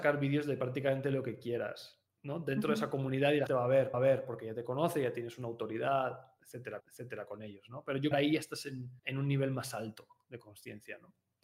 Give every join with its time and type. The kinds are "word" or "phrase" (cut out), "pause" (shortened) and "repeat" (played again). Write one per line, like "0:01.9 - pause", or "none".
0:02.1 - pause
0:03.5 - word
0:03.9 - repeat
0:06.8 - repeat
0:08.1 - phrase
0:09.0 - pause